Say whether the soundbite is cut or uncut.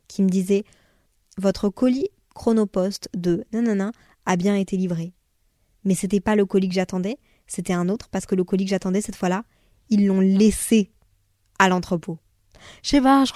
uncut